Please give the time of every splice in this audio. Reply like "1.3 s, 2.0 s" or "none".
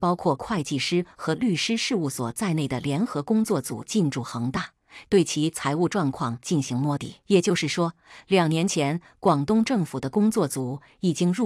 7.2 s